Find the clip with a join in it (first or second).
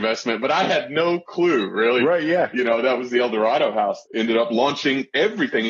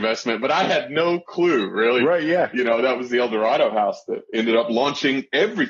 first